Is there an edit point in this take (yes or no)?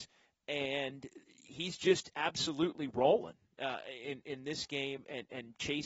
no